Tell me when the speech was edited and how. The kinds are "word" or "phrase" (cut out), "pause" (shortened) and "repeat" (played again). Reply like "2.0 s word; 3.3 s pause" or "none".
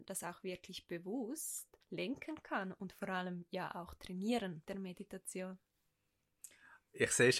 1.8 s pause; 4.6 s word